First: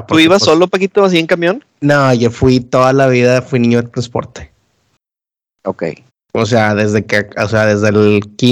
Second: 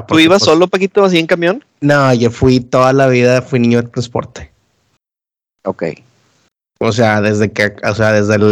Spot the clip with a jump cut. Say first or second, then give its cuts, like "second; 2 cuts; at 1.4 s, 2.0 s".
first; 1 cut; at 6.1 s